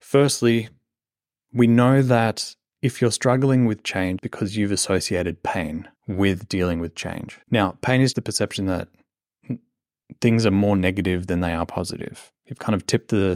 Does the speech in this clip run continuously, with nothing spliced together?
no; 4 cuts; at 4.2 s, 6.0 s, 7.4 s, 8.1 s

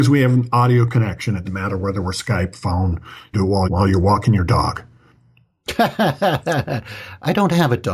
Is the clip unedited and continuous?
no; 3 cuts; at 1.5 s, 3.3 s, 3.7 s

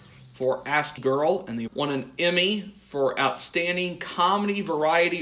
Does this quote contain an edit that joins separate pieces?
yes; 2 cuts; at 1.0 s, 1.7 s

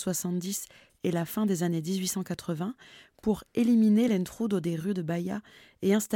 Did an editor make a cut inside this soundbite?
no; 0 cuts

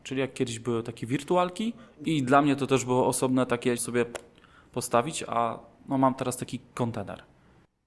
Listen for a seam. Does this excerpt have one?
yes; 1 cut; at 3.8 s

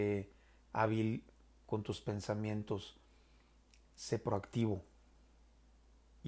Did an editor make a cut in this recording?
no; 0 cuts

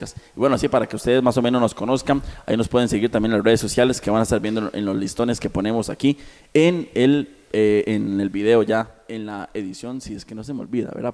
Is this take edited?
no; 0 cuts

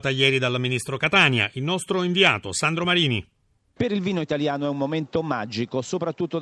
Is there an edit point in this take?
no; 0 cuts

